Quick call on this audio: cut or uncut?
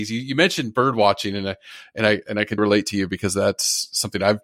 cut